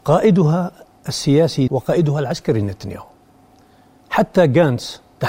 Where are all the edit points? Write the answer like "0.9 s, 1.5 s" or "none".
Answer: 1.7 s